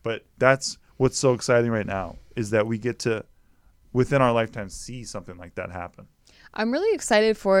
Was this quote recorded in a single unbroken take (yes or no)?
yes